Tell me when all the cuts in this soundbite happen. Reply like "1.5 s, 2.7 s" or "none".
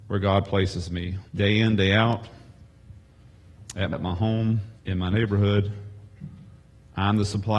1.3 s, 3.9 s, 4.8 s